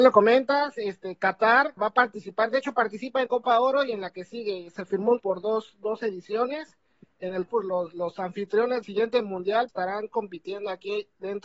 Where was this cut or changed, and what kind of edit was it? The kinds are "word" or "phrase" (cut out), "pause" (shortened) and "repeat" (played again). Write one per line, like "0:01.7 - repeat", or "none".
0:01.8 - word
0:03.3 - word
0:05.2 - word
0:07.5 - word
0:08.8 - word
0:09.7 - word